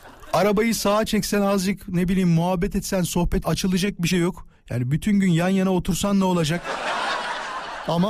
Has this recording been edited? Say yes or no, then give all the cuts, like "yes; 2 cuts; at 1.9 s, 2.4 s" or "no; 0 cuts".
yes; 2 cuts; at 3.4 s, 4.1 s